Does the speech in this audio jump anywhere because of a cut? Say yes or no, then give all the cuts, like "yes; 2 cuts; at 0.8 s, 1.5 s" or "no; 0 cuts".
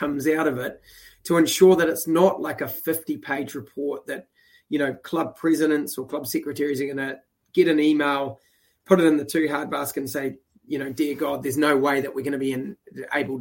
no; 0 cuts